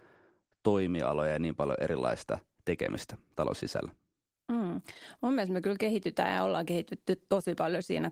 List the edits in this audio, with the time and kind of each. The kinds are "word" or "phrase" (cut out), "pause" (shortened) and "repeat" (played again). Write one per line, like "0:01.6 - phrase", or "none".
none